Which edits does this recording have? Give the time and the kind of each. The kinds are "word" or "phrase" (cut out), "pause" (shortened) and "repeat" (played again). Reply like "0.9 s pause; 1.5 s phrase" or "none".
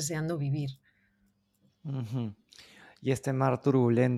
none